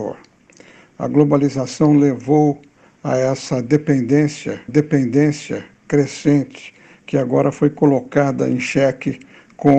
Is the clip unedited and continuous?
no; 1 cut; at 4.7 s

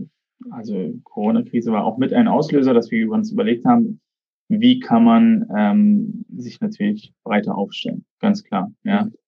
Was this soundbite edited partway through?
yes; 1 cut; at 6.3 s

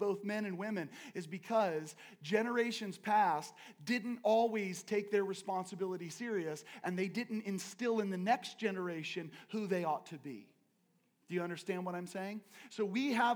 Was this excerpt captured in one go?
yes; 0 cuts

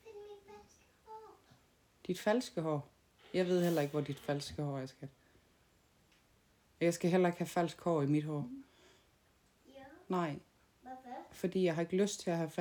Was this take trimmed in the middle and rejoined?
no; 0 cuts

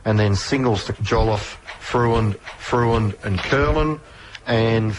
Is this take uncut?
no; 2 cuts; at 0.9 s, 2.4 s

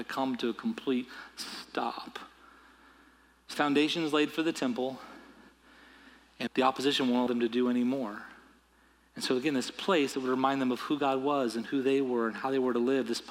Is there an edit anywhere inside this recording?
yes; 3 cuts; at 3.5 s, 6.5 s, 7.3 s

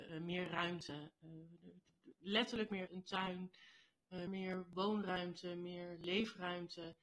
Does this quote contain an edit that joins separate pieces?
yes; 2 cuts; at 2.9 s, 4.3 s

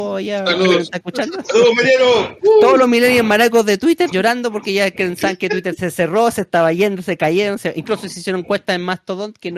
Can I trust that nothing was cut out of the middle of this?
no; 1 cut; at 4.1 s

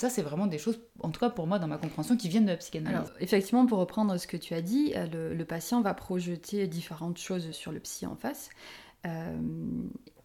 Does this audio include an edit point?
yes; 1 cut; at 7.5 s

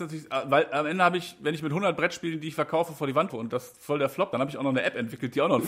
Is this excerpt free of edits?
no; 2 cuts; at 3.3 s, 4.3 s

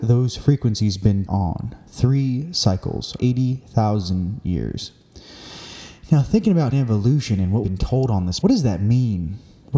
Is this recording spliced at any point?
yes; 5 cuts; at 1.3 s, 3.2 s, 6.7 s, 7.6 s, 8.4 s

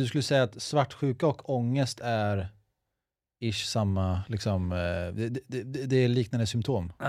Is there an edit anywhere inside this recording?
no; 0 cuts

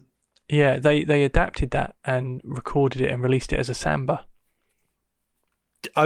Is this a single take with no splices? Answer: yes; 0 cuts

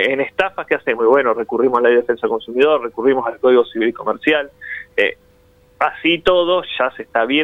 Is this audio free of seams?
yes; 0 cuts

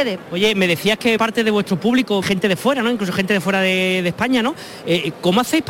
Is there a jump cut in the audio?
yes; 2 cuts; at 1.2 s, 2.2 s

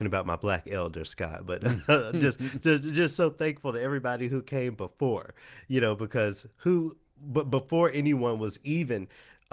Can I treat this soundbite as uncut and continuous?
yes; 0 cuts

